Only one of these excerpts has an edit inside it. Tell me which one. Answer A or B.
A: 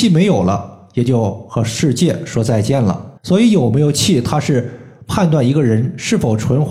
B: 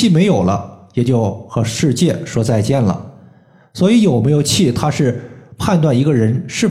A